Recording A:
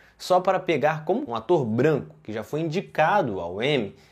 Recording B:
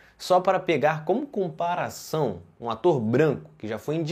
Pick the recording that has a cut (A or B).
A